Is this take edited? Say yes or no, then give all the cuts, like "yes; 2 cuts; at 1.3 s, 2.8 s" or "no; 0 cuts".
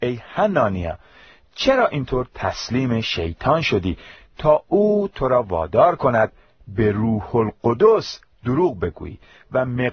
no; 0 cuts